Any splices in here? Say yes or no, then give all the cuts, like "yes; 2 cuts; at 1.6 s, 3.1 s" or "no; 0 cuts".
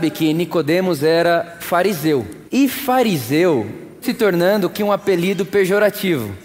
yes; 4 cuts; at 1.6 s, 2.5 s, 4.0 s, 4.7 s